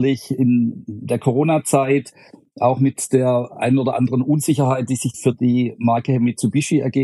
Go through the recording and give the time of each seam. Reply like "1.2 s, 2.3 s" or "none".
5.1 s

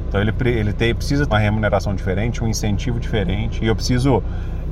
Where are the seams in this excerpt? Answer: 1.3 s

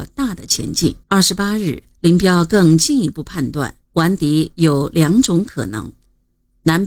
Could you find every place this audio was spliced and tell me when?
1.0 s, 3.8 s

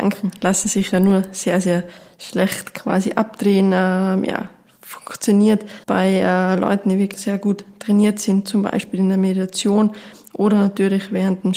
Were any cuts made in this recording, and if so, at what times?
5.8 s

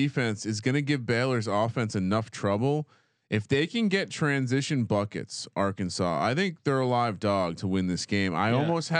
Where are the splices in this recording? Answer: none

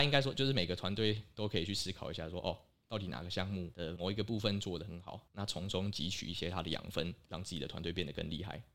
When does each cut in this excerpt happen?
none

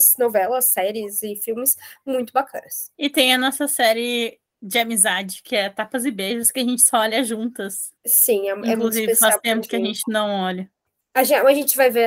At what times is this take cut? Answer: 2.9 s, 8.0 s, 10.9 s

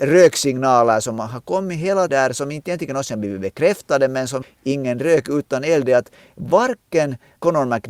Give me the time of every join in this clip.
2.1 s, 4.4 s

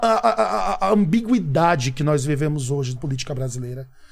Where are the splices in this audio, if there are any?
3.0 s

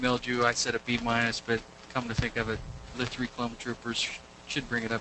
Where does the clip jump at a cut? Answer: 2.9 s

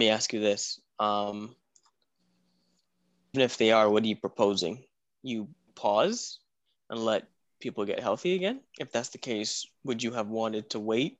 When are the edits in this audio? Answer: 3.3 s, 5.7 s, 8.7 s

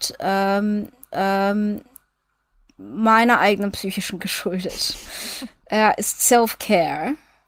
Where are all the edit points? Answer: 1.1 s, 4.2 s

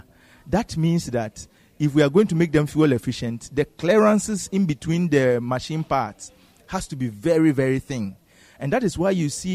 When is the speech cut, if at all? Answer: none

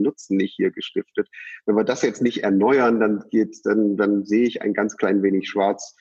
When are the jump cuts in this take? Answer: none

